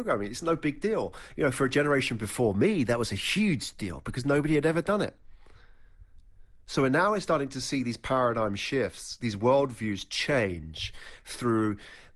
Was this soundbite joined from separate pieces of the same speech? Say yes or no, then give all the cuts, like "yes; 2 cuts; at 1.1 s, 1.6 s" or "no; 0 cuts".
no; 0 cuts